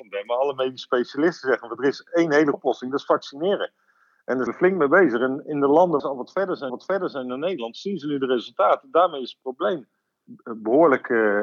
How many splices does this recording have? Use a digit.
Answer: 4